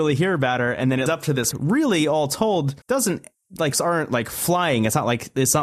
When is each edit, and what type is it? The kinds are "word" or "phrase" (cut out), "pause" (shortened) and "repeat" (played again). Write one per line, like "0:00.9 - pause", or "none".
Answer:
0:01.1 - word
0:01.5 - phrase
0:02.8 - pause
0:03.7 - word